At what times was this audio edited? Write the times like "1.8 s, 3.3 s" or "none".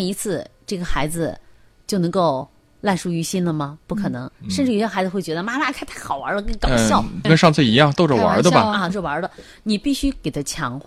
7.2 s, 8.9 s